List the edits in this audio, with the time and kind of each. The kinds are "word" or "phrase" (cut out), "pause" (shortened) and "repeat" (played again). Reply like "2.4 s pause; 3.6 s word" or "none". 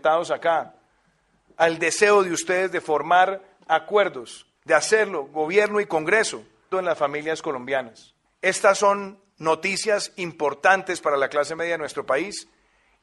4.6 s pause; 6.7 s word; 8.2 s pause